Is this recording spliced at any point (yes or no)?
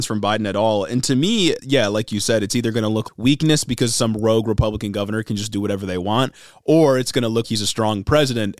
yes